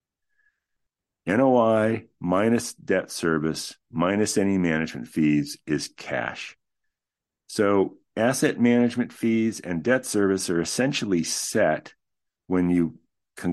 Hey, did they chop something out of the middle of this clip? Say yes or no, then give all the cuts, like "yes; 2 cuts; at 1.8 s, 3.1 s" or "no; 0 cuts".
no; 0 cuts